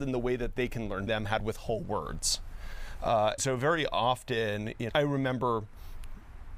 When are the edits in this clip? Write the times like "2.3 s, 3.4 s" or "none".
1.1 s, 1.4 s, 3.4 s, 4.9 s